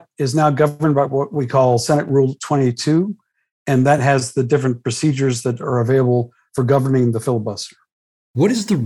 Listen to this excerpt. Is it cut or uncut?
uncut